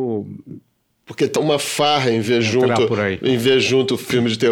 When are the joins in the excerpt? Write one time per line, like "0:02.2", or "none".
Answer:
0:01.4